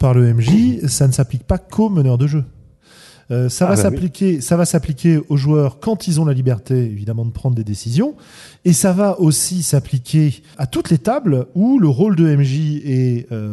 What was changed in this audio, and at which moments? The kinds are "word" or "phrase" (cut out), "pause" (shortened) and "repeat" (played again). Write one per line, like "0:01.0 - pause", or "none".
0:10.5 - word